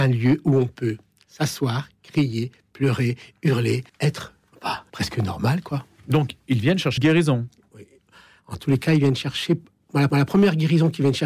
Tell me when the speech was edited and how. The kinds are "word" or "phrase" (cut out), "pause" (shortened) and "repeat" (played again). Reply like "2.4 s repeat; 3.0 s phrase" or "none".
3.9 s pause; 4.9 s pause; 7.0 s word; 10.1 s repeat